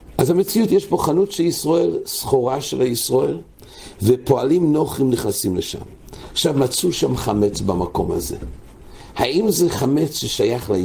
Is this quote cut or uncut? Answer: uncut